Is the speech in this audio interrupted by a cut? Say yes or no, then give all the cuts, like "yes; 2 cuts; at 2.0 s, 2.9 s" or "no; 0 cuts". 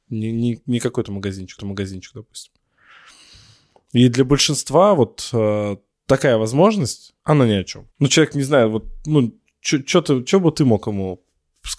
yes; 4 cuts; at 1.6 s, 5.9 s, 7.2 s, 7.9 s